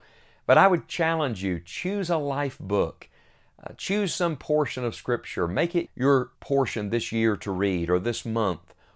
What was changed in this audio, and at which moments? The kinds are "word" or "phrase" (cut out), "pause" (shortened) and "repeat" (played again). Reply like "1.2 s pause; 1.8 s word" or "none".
5.9 s word; 6.3 s pause